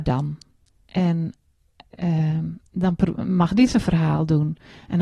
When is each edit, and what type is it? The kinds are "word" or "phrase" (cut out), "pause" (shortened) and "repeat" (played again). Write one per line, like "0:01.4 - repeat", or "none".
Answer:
0:02.7 - pause